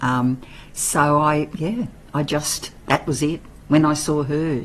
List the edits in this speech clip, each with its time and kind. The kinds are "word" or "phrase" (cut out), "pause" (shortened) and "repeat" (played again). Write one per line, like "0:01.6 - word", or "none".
none